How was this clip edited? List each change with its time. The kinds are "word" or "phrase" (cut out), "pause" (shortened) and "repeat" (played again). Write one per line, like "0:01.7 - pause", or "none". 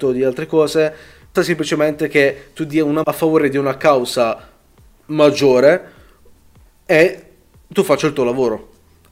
0:01.4 - word
0:03.0 - word

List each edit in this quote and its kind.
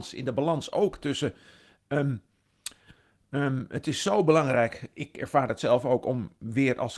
none

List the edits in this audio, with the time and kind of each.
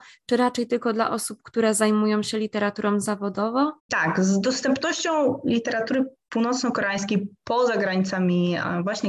0:03.8 - pause

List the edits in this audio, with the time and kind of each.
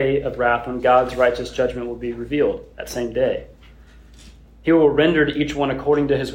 none

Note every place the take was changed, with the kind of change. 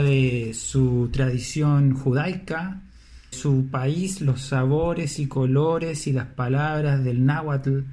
0:03.3 - phrase

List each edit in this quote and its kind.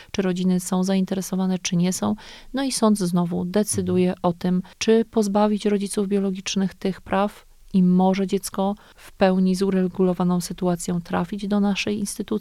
none

